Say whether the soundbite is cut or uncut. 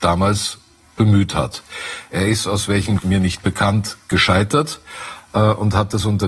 cut